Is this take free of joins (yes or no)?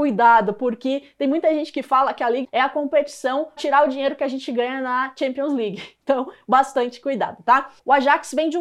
no